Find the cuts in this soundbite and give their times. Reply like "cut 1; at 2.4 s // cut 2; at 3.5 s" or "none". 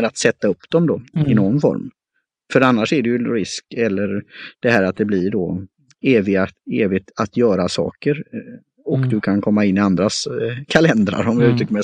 none